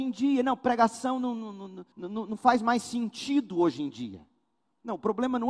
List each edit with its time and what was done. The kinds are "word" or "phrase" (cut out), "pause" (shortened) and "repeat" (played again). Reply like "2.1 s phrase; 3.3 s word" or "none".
1.9 s pause

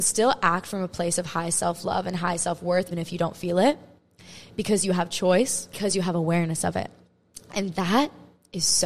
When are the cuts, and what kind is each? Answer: 2.9 s word

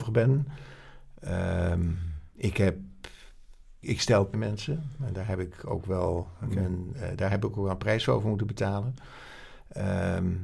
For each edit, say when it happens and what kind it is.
3.8 s word; 4.3 s phrase

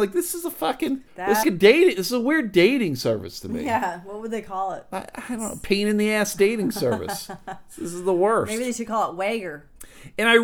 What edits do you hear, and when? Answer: 1.1 s pause; 1.4 s word

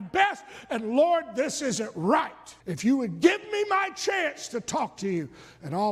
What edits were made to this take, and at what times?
2.6 s pause

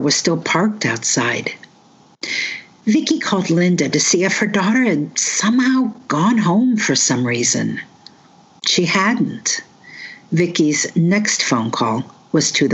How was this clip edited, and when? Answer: none

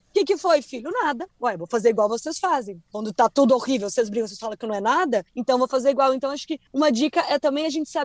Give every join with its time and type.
1.3 s pause; 5.3 s pause; 6.7 s pause

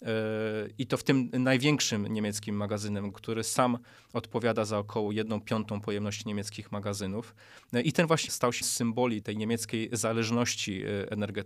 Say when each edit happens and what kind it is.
3.1 s word; 8.3 s word; 8.6 s word; 9.2 s word

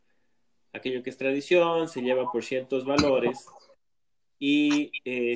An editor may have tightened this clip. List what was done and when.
none

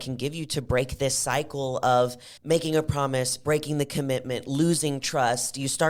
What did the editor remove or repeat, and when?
2.4 s pause

